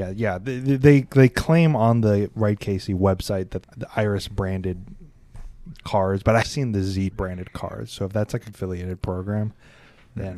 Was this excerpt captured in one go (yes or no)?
no